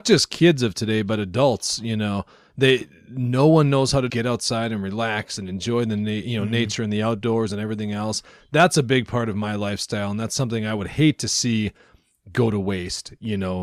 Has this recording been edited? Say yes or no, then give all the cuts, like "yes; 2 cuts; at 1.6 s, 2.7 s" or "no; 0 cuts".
yes; 1 cut; at 4.1 s